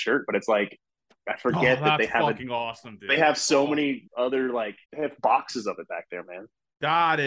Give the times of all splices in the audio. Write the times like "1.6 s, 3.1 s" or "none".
4.1 s, 4.9 s